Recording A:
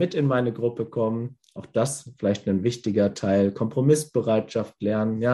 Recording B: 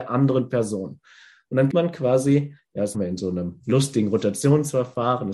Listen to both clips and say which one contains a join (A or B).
B